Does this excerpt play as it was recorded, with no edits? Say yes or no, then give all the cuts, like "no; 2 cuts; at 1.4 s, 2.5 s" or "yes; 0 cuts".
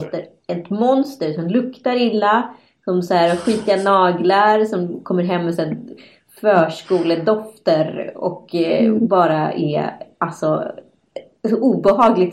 yes; 0 cuts